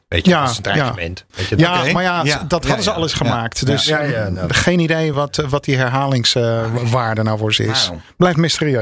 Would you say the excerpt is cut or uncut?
uncut